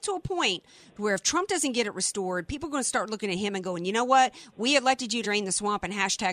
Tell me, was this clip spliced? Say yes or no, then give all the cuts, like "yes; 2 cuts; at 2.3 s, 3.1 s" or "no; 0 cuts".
yes; 1 cut; at 5.2 s